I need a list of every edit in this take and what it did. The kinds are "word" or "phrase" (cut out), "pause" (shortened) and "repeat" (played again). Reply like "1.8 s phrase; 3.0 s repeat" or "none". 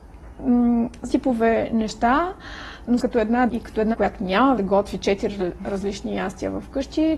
1.1 s word; 3.0 s word; 3.5 s word; 3.9 s word; 4.6 s word